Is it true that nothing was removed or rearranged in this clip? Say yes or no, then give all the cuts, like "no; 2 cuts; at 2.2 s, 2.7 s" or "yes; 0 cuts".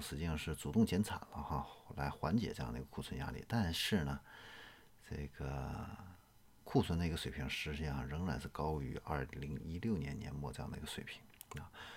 no; 1 cut; at 6.6 s